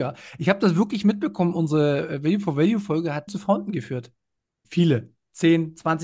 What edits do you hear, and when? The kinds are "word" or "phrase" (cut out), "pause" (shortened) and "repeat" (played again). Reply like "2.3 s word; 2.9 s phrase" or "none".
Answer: 3.3 s word; 4.6 s word